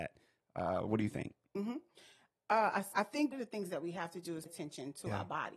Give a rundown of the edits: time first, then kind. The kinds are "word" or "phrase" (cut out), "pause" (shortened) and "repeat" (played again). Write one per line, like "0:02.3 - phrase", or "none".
0:02.9 - word
0:03.3 - word
0:04.5 - word